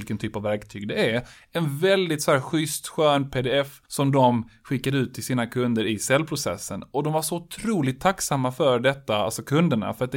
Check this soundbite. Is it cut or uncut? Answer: cut